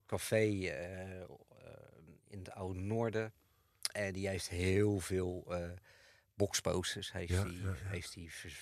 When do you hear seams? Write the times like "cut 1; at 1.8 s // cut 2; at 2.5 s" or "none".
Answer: cut 1; at 2.2 s